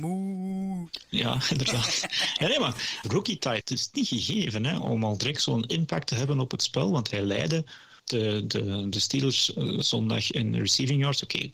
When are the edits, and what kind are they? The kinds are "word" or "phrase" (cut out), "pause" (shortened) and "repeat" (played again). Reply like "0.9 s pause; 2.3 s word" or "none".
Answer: 3.0 s word; 3.6 s word; 4.8 s word; 8.0 s pause

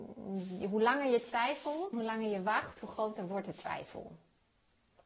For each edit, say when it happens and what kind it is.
1.9 s word

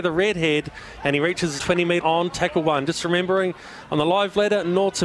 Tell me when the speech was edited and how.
1.6 s word; 2.0 s word

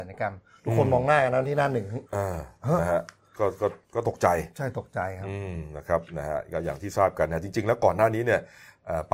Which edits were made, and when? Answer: 2.1 s pause; 3.8 s pause

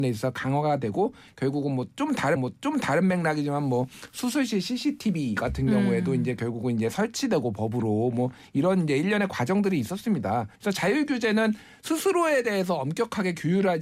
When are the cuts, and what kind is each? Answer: 2.4 s repeat; 10.6 s pause

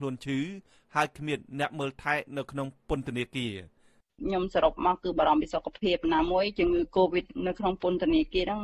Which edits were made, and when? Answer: none

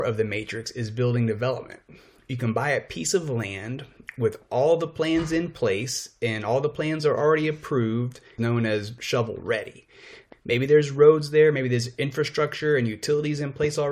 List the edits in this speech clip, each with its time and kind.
none

